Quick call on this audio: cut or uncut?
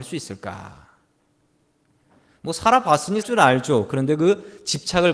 cut